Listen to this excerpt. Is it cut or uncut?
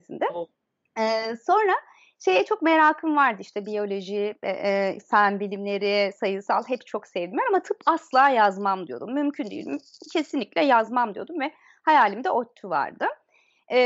uncut